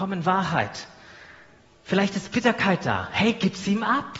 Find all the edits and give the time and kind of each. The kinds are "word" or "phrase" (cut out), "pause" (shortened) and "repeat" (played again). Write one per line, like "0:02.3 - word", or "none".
none